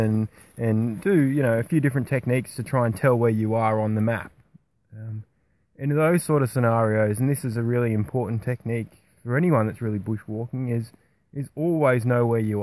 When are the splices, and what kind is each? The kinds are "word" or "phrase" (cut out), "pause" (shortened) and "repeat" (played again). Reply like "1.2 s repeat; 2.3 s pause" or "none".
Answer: none